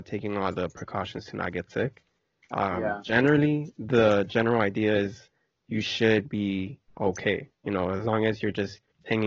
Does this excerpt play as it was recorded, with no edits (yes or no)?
yes